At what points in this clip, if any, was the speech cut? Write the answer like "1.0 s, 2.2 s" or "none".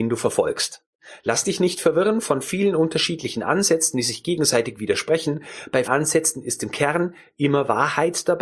5.8 s

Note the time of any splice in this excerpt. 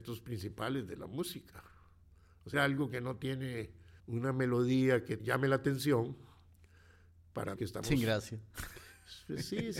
2.5 s, 4.0 s, 5.2 s, 7.6 s

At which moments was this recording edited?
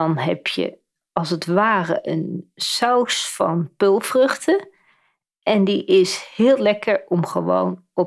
none

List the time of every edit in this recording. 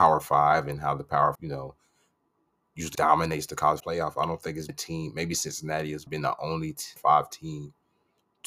1.3 s, 2.9 s, 3.8 s, 4.7 s, 6.1 s, 7.0 s

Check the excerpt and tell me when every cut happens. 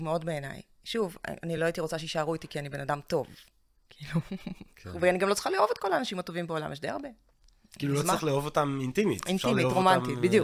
none

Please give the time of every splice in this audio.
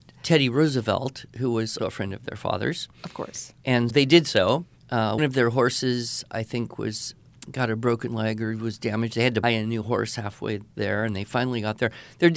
1.8 s, 3.9 s, 5.2 s, 9.4 s

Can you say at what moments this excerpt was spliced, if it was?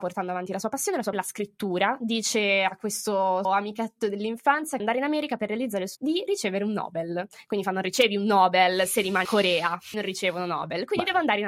1.1 s, 3.4 s, 4.8 s, 5.9 s, 9.2 s, 9.9 s

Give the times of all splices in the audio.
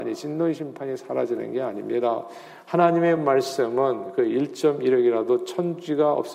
none

